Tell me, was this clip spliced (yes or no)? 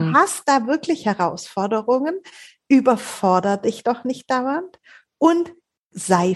no